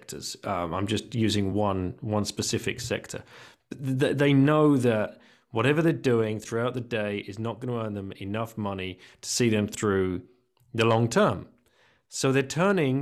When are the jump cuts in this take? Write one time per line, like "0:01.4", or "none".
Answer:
none